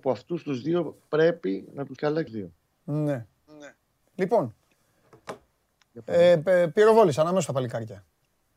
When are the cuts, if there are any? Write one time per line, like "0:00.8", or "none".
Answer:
0:02.0
0:02.3